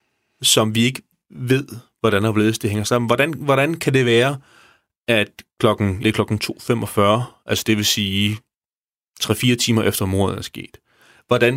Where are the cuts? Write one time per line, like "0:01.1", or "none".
0:01.1
0:06.0